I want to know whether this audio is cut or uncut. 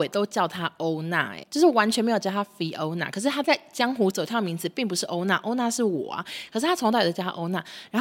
cut